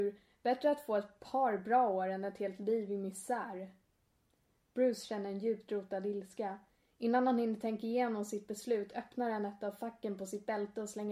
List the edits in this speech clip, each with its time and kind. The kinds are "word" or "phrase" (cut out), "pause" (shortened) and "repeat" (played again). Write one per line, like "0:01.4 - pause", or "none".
none